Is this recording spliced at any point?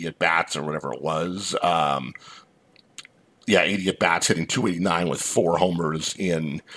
no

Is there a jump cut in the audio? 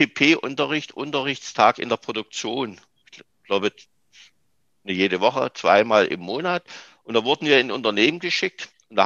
no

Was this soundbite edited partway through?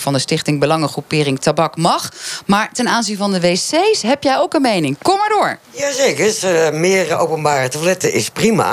yes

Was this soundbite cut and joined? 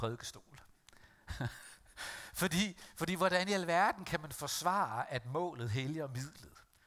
no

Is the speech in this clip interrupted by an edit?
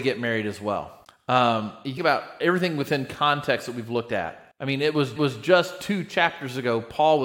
yes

